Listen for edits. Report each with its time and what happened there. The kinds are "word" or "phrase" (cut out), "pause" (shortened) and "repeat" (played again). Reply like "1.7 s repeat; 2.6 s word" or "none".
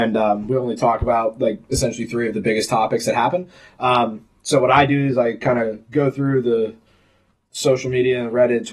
none

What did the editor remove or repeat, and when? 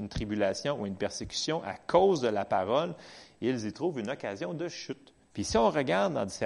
5.2 s pause

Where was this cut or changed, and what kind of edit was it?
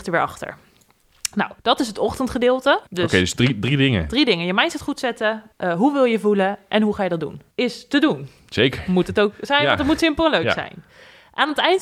1.6 s pause; 2.9 s pause; 5.5 s pause; 7.5 s pause

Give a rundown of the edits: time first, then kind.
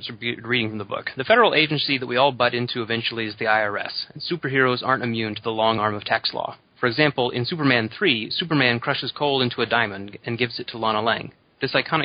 none

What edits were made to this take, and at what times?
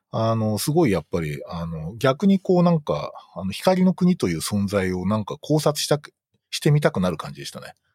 none

